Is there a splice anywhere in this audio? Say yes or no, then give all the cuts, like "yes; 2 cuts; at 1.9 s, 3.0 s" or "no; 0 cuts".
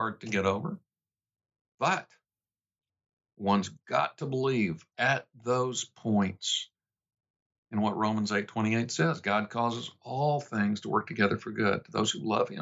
no; 0 cuts